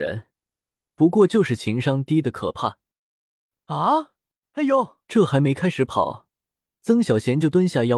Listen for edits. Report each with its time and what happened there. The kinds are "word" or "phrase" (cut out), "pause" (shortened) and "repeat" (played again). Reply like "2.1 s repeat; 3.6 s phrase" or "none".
4.4 s pause; 5.0 s pause